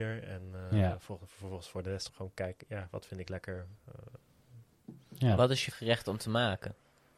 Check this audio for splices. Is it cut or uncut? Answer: cut